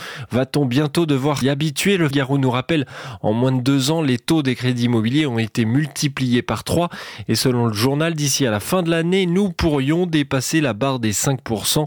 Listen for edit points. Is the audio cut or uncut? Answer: cut